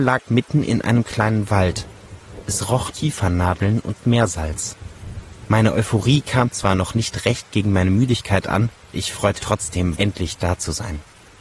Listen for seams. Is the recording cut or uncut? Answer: cut